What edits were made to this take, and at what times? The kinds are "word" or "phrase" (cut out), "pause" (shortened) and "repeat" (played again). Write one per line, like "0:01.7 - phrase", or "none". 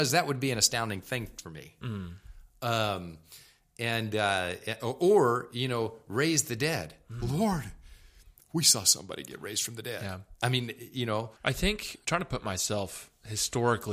0:11.4 - pause
0:12.0 - word